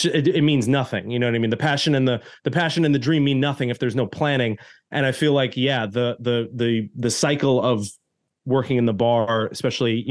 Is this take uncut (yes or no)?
yes